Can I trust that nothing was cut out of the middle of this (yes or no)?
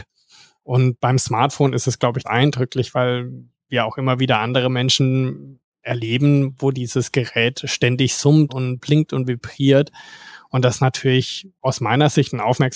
no